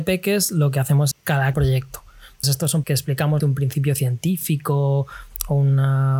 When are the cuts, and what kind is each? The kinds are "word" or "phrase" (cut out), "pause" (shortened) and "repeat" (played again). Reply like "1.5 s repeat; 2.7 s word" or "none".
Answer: 1.1 s word; 1.5 s phrase; 2.4 s word; 2.8 s word; 3.4 s word